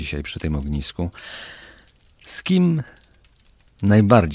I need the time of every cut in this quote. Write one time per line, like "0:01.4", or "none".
none